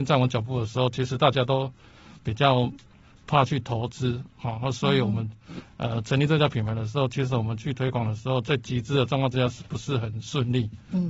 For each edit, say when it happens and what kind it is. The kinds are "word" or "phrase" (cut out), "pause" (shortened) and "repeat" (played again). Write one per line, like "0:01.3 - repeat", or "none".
none